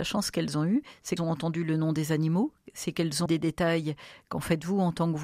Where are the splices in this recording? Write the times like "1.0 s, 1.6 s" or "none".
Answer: 1.2 s, 3.3 s